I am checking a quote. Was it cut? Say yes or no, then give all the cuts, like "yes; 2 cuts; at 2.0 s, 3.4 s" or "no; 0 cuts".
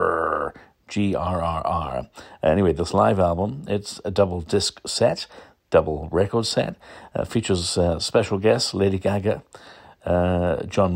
no; 0 cuts